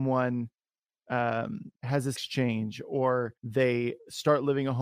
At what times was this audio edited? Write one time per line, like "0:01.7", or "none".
0:01.8
0:02.2
0:03.4